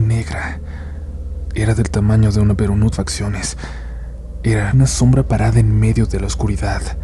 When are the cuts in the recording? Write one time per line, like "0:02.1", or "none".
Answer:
0:02.5
0:02.9
0:04.7

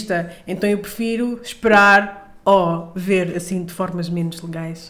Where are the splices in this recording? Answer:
none

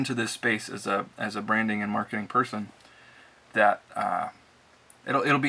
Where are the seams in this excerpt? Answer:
none

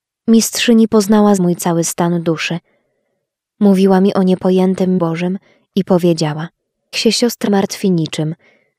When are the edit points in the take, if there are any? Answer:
0:01.4
0:05.0
0:06.9
0:07.5

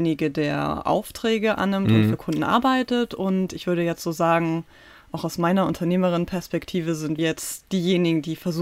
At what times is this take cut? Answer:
0:07.2

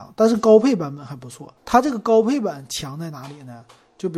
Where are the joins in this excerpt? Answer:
0:01.6

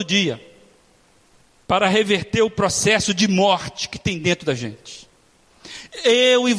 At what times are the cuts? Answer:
none

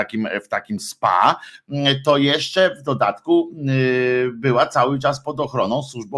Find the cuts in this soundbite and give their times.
none

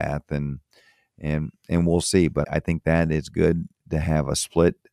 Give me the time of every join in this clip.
0:02.4

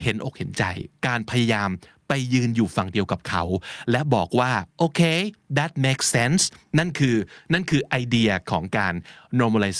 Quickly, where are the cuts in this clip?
none

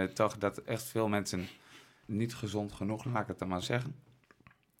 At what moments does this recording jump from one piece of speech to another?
0:02.0
0:03.0
0:03.6

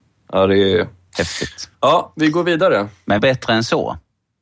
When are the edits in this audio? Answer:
0:01.1
0:01.7
0:03.2

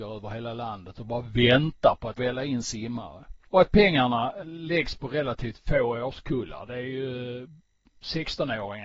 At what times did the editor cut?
0:02.2
0:03.5
0:04.4

